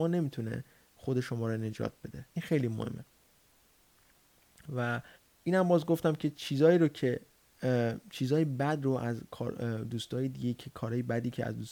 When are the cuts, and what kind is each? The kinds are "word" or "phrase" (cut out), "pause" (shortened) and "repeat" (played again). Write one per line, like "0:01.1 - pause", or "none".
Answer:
0:02.3 - pause
0:05.1 - pause